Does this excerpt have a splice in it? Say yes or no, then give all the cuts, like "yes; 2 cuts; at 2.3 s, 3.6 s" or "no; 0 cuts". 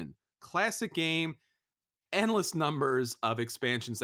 no; 0 cuts